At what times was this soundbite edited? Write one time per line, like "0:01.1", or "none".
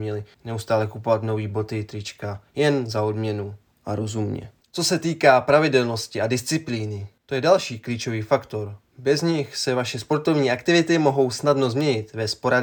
none